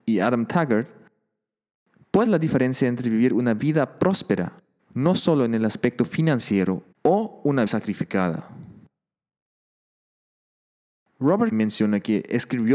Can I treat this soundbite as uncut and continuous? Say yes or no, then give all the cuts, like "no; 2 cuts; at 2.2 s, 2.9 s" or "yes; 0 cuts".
no; 5 cuts; at 2.3 s, 4.8 s, 6.9 s, 7.7 s, 11.5 s